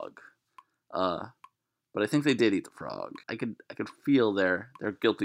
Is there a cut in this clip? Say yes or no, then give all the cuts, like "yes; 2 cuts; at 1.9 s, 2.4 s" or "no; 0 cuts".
yes; 1 cut; at 3.2 s